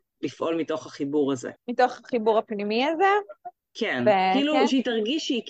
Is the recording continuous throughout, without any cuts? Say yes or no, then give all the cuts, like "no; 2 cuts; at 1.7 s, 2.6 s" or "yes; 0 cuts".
no; 1 cut; at 1.6 s